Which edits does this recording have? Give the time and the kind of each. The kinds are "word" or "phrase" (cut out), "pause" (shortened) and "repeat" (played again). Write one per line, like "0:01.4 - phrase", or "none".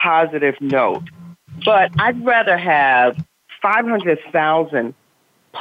none